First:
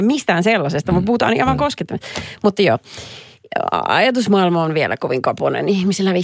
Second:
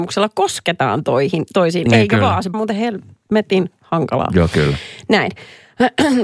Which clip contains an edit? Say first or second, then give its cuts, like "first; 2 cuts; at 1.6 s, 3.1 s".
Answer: second; 1 cut; at 2.5 s